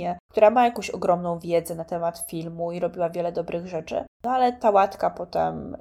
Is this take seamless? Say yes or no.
yes